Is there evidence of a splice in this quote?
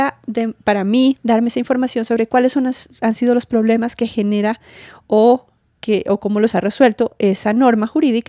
no; 0 cuts

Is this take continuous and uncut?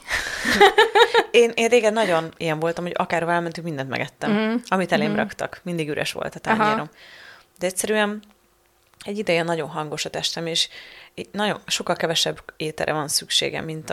yes; 0 cuts

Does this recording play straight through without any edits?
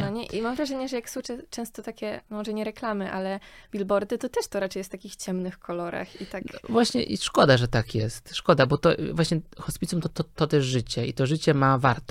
yes; 0 cuts

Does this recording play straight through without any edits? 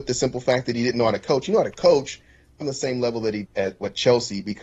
no; 2 cuts; at 2.6 s, 3.4 s

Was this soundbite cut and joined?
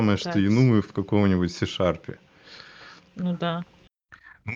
no; 0 cuts

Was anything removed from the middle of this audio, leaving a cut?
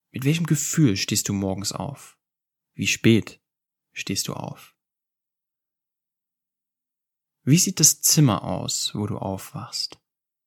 no; 0 cuts

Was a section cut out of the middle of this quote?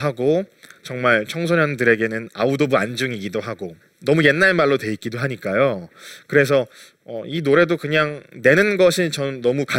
yes; 1 cut; at 3.8 s

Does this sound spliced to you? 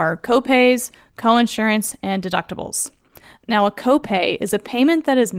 no; 0 cuts

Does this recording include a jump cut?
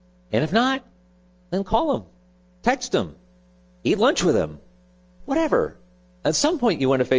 no; 0 cuts

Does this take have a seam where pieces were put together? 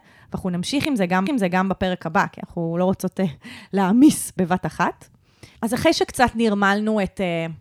yes; 2 cuts; at 1.3 s, 5.5 s

